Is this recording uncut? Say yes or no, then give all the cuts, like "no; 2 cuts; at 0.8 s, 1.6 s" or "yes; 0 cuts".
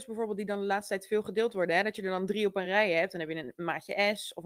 yes; 0 cuts